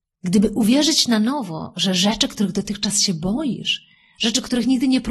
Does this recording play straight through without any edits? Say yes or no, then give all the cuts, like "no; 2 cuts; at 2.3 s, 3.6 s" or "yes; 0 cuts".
yes; 0 cuts